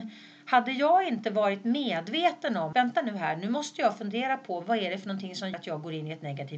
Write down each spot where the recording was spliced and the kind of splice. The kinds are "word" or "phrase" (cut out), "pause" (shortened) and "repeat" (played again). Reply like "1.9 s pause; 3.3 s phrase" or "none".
2.7 s word; 5.5 s word